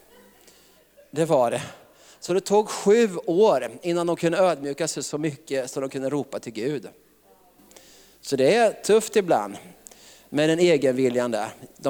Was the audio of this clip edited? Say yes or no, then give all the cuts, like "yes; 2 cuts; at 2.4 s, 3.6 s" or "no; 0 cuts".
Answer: no; 0 cuts